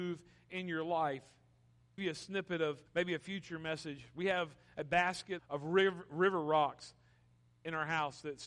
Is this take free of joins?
no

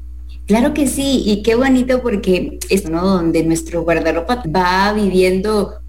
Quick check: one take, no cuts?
no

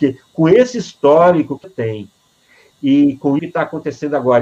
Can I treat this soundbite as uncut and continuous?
no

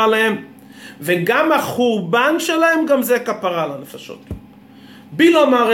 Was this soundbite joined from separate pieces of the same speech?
no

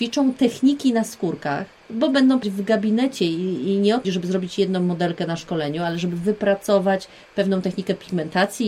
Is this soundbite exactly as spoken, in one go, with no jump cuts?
no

